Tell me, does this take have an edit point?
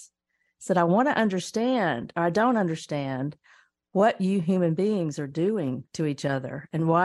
no; 0 cuts

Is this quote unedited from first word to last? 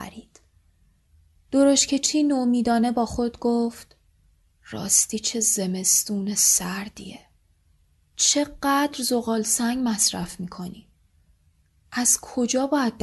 yes; 0 cuts

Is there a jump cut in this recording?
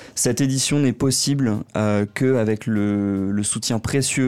no; 0 cuts

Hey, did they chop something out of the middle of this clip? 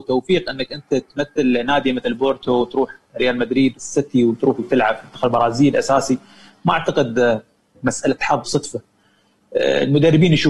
yes; 3 cuts; at 3.7 s, 4.6 s, 8.4 s

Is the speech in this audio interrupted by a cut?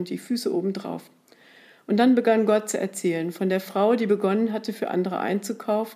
no; 0 cuts

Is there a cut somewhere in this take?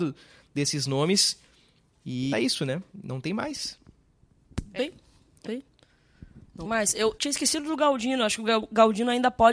yes; 5 cuts; at 2.3 s, 4.8 s, 5.5 s, 6.6 s, 7.2 s

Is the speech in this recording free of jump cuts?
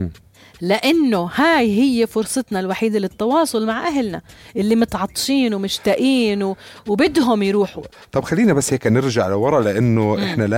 yes; 0 cuts

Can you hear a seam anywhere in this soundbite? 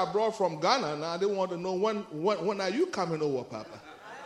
no; 0 cuts

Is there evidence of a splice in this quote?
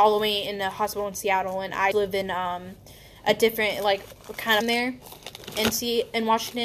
yes; 2 cuts; at 1.9 s, 4.6 s

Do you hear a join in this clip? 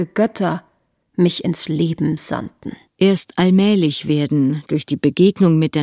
yes; 1 cut; at 2.9 s

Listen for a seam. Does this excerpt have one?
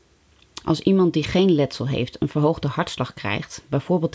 no; 0 cuts

